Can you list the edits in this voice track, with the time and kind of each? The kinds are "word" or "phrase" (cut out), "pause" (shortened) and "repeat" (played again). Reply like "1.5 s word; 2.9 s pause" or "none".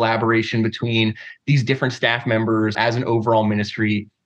2.7 s word